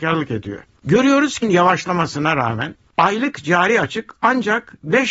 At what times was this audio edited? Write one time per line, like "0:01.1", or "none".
0:01.4